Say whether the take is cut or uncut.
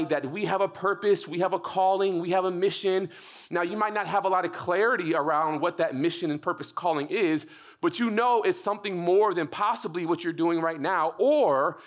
uncut